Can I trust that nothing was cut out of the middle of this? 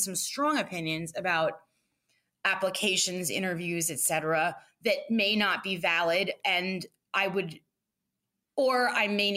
yes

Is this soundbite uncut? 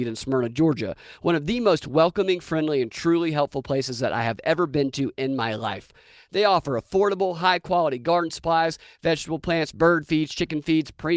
yes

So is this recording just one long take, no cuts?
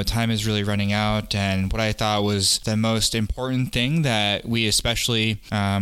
yes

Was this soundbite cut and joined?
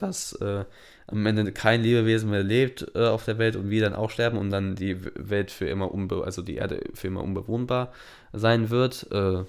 no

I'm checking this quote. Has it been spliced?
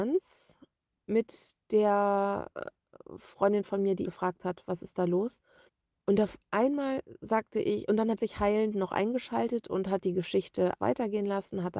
yes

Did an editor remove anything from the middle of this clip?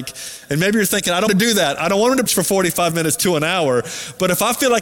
yes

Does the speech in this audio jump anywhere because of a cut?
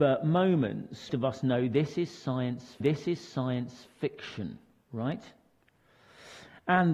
yes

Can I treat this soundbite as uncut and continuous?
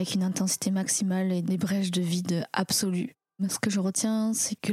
yes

